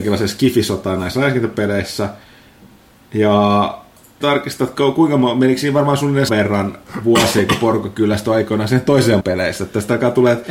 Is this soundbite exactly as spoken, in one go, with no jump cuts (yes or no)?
no